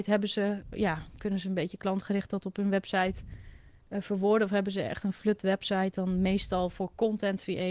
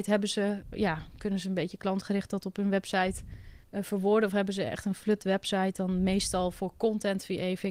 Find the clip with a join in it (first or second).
second